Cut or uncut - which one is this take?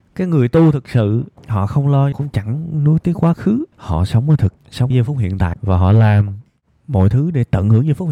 cut